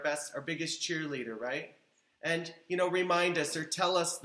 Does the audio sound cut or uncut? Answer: uncut